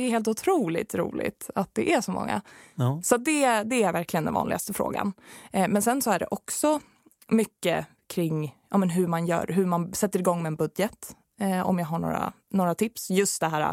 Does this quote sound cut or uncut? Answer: uncut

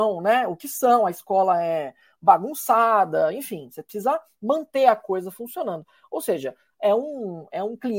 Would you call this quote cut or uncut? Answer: uncut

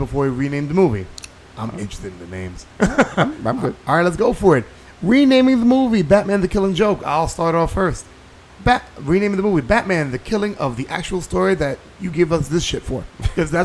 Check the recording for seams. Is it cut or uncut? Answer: uncut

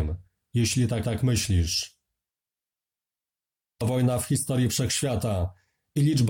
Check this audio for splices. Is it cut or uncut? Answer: cut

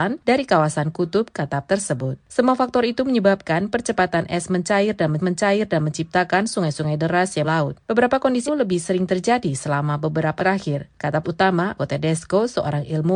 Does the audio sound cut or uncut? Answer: cut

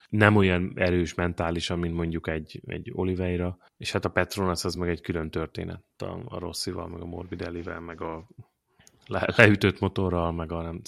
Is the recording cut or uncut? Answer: uncut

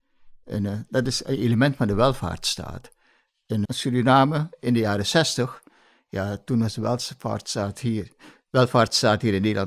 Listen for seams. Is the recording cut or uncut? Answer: cut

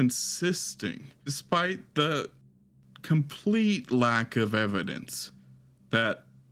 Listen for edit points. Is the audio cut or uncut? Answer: uncut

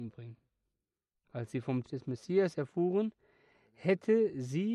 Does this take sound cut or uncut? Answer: cut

